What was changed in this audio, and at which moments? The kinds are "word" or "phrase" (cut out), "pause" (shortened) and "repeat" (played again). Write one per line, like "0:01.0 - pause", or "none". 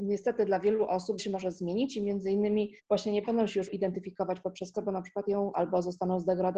0:01.2 - phrase
0:02.8 - pause
0:03.7 - word
0:04.7 - word
0:05.5 - word